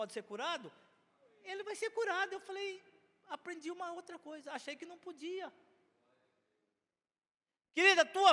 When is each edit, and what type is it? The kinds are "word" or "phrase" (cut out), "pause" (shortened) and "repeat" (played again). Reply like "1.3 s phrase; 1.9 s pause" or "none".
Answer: none